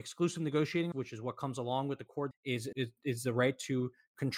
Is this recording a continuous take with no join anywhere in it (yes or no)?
no